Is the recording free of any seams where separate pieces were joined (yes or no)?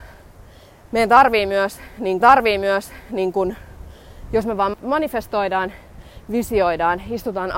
no